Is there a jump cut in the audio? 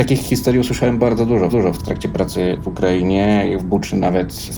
yes; 2 cuts; at 1.5 s, 3.6 s

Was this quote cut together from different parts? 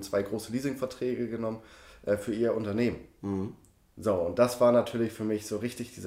no; 0 cuts

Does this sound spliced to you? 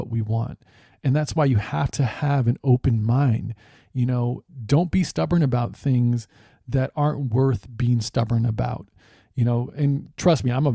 no; 0 cuts

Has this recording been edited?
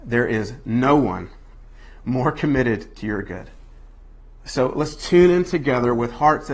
no; 0 cuts

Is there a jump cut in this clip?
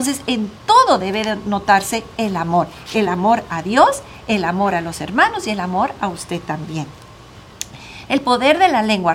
no; 0 cuts

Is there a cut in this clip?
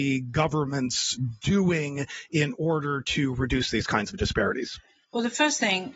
no; 0 cuts

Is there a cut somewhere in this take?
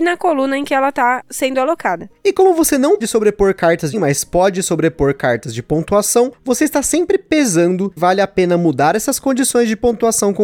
yes; 3 cuts; at 3.0 s, 3.9 s, 8.0 s

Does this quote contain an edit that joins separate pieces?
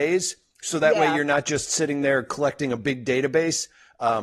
no; 0 cuts

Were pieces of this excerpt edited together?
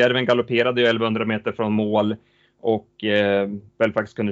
no; 0 cuts

